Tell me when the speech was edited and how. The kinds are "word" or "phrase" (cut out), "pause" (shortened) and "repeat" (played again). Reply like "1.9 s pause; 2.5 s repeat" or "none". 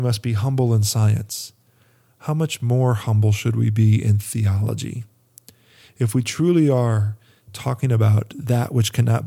none